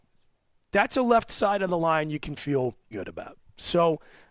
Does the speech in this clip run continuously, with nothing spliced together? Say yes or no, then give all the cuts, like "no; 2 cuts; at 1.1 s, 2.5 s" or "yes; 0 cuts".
no; 1 cut; at 2.9 s